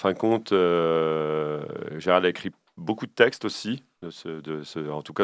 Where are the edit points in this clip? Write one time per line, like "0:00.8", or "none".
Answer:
none